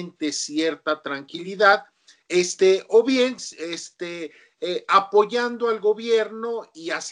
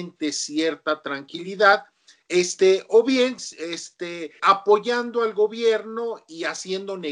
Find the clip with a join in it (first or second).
second